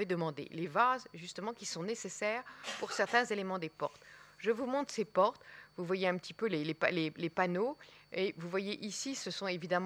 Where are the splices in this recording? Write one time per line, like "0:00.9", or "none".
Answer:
none